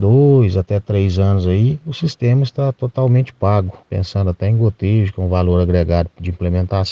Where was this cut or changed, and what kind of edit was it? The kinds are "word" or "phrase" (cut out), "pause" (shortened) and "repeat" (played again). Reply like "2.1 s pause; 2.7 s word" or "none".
3.8 s pause